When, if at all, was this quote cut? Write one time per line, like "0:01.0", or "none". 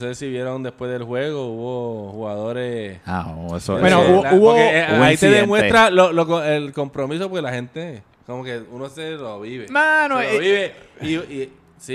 0:08.1